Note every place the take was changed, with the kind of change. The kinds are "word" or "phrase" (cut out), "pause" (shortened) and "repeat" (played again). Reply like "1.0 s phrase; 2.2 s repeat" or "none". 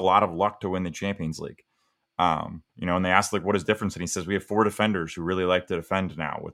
2.7 s pause